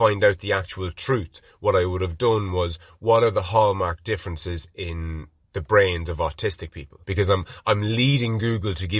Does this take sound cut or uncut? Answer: cut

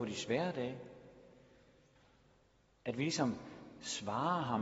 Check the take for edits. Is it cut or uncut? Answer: uncut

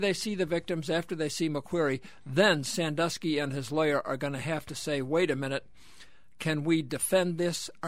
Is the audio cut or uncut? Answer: uncut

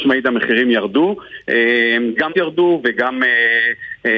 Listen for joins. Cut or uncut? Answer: cut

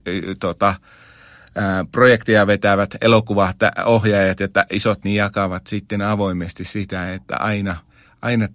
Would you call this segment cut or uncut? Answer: cut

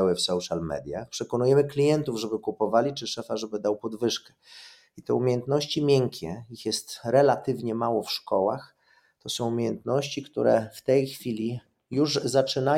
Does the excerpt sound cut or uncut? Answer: uncut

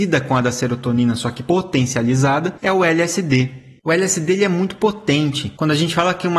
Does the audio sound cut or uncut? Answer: uncut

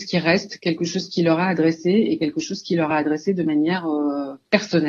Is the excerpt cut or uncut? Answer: uncut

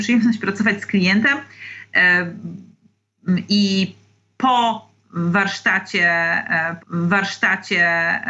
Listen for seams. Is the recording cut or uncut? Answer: cut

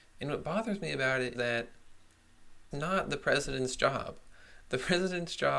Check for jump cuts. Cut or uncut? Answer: cut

